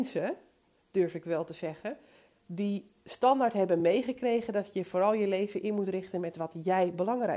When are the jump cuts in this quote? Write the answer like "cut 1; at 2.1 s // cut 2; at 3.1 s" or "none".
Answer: none